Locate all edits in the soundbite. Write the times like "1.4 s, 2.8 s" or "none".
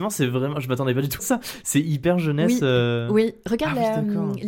1.2 s